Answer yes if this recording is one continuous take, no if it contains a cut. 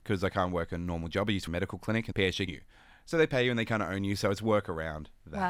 no